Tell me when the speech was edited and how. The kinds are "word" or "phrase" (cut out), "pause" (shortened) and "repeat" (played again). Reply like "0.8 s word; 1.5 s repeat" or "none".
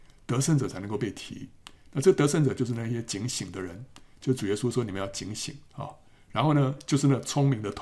5.7 s pause